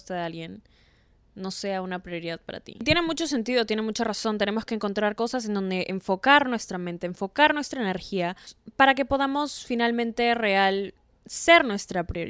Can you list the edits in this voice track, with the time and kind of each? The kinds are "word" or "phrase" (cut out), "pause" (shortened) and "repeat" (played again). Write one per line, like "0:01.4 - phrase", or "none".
none